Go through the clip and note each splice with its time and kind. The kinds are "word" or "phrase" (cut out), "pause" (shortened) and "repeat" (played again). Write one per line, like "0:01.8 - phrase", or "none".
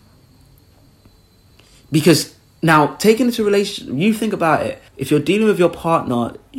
0:04.9 - pause